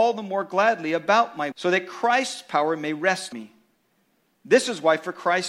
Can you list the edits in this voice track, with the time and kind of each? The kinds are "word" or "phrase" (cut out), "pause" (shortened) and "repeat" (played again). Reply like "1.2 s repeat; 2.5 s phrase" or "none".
1.5 s word; 3.3 s word